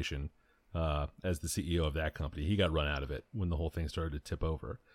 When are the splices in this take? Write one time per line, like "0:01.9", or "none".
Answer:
none